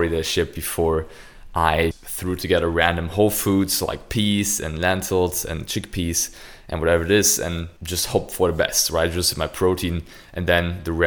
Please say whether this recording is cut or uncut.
cut